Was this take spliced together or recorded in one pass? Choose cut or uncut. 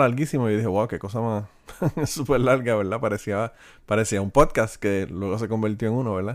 uncut